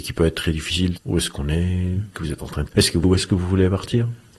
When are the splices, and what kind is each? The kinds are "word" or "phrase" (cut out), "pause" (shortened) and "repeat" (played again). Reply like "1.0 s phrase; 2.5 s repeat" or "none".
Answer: 1.0 s word; 2.1 s word; 2.7 s word; 3.0 s word